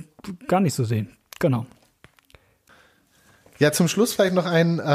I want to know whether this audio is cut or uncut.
uncut